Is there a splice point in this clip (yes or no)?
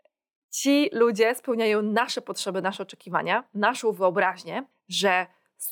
yes